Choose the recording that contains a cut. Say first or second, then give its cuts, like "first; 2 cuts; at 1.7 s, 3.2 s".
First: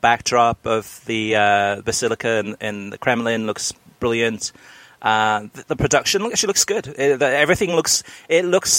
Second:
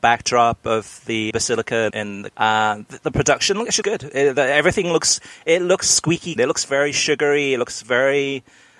second; 5 cuts; at 1.3 s, 1.9 s, 2.3 s, 3.8 s, 6.4 s